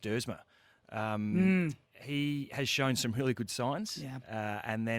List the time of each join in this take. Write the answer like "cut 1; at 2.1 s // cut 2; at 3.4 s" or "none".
cut 1; at 1.8 s